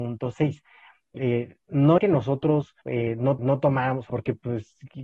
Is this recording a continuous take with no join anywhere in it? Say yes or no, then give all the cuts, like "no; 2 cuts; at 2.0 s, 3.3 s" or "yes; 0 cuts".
no; 4 cuts; at 2.0 s, 2.8 s, 3.4 s, 4.1 s